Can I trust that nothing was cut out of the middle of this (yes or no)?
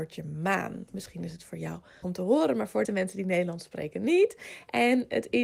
no